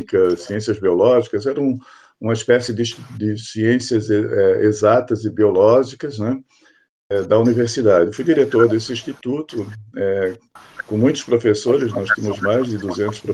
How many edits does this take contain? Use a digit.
0